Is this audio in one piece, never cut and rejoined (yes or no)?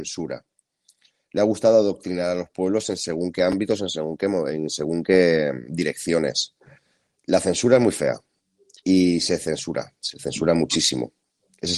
yes